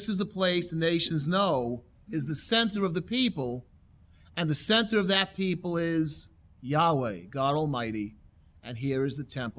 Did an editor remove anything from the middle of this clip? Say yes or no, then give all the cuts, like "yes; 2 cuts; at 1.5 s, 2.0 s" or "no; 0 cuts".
no; 0 cuts